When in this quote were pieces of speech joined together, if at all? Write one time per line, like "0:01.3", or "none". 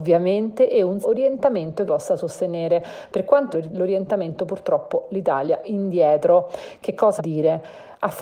0:01.0
0:01.9
0:03.5
0:05.6
0:07.2